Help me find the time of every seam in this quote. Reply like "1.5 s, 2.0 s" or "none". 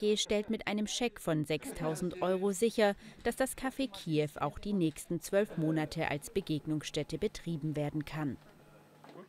none